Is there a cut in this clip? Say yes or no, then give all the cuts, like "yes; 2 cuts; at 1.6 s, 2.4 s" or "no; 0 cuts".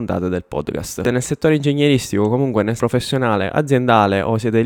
yes; 2 cuts; at 1.0 s, 2.8 s